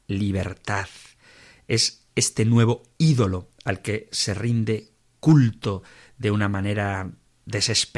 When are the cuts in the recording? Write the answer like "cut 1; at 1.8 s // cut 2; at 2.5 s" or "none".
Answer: none